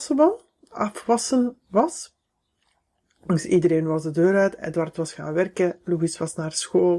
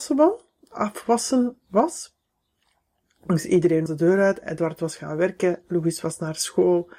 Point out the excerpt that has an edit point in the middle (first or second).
second